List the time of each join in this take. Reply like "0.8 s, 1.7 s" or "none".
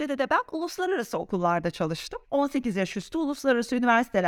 2.2 s